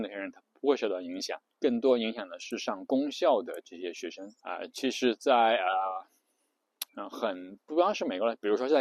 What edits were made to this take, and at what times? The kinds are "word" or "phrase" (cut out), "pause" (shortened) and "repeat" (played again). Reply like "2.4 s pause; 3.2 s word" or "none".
1.5 s pause; 4.4 s pause; 6.9 s pause